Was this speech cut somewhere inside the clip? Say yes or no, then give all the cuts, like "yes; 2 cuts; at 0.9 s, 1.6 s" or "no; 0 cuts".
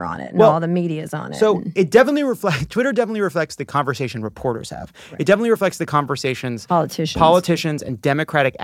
no; 0 cuts